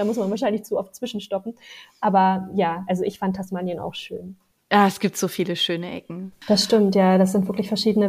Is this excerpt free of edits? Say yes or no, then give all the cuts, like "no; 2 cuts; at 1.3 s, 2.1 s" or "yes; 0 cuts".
yes; 0 cuts